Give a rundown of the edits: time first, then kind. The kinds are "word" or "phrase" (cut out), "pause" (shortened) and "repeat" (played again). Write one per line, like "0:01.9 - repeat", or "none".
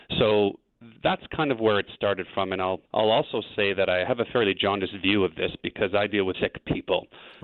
0:01.0 - pause
0:02.9 - pause
0:06.3 - word